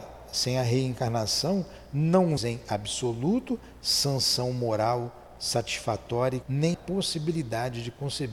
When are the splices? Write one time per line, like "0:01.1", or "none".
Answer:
0:02.4
0:06.4
0:06.7